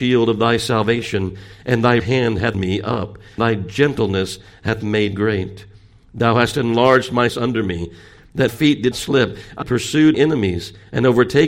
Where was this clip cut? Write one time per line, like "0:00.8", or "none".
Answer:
0:02.0
0:02.5
0:03.4
0:05.1
0:07.3
0:08.5
0:08.9
0:09.6
0:10.1